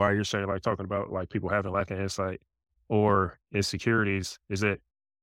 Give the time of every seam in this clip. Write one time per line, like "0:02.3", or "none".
none